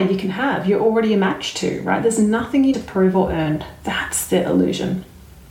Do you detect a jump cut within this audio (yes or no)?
yes